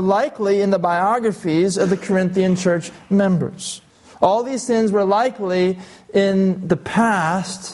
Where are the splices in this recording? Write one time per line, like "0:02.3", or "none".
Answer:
0:03.9